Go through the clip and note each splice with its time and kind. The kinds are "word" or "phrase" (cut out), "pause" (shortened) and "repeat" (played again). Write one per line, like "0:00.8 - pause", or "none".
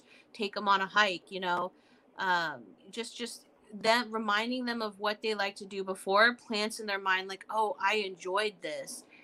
0:02.8 - pause